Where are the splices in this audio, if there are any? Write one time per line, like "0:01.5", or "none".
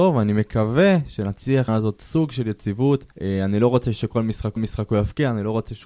0:01.7
0:03.1
0:04.6